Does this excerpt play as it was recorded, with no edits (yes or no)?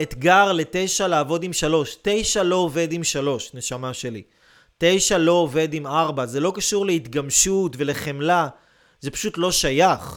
yes